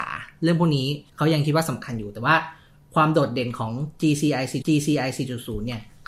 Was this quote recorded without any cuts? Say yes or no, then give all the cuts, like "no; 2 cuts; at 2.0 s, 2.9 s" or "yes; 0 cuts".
no; 2 cuts; at 1.1 s, 4.6 s